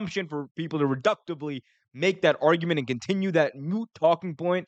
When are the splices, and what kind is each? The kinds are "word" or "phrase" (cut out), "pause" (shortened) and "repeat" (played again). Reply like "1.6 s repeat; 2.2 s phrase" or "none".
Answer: none